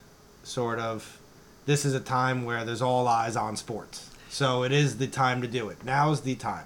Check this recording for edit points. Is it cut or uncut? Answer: uncut